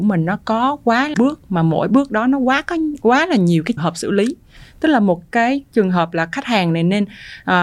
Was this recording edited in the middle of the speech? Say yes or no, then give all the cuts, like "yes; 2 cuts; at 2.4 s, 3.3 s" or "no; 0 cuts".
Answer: yes; 2 cuts; at 1.1 s, 3.8 s